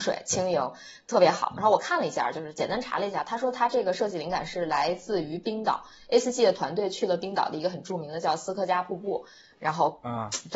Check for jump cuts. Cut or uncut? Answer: uncut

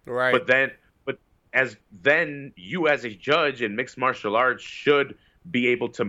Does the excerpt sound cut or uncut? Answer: uncut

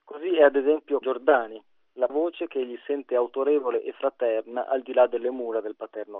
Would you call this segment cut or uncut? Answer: cut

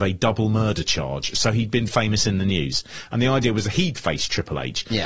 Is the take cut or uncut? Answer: cut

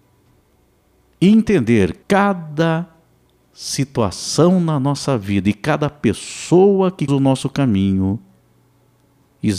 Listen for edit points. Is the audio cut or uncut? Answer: cut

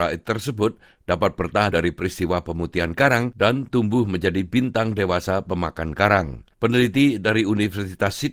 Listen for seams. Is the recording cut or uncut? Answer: cut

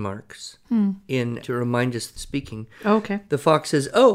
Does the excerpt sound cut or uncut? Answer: cut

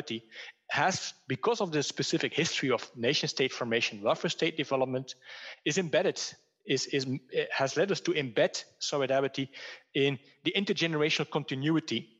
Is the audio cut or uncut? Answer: uncut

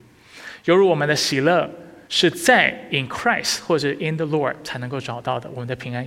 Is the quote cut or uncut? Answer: cut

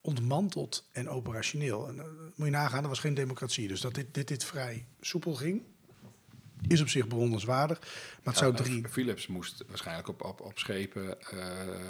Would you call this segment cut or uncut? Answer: uncut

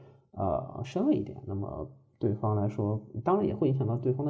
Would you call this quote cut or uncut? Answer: uncut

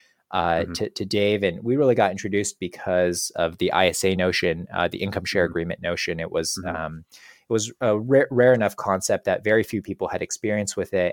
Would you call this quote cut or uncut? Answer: uncut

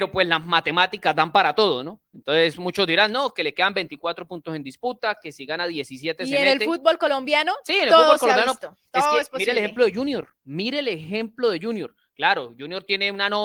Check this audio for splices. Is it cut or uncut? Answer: cut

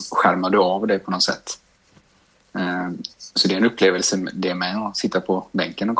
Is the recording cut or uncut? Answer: uncut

